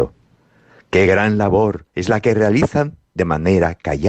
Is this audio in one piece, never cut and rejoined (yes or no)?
no